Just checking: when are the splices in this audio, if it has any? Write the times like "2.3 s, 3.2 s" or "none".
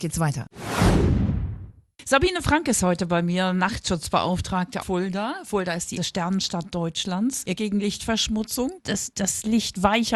4.8 s, 6.0 s, 7.6 s, 8.8 s